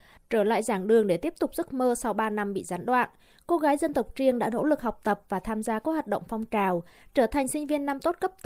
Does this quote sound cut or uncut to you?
uncut